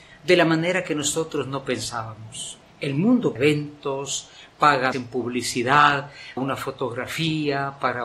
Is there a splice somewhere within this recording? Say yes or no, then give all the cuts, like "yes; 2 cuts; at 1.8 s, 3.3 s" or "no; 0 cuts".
yes; 4 cuts; at 2.6 s, 3.4 s, 4.9 s, 6.4 s